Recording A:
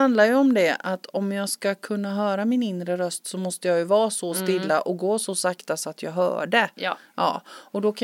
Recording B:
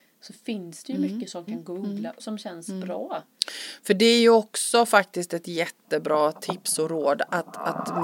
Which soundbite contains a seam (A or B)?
B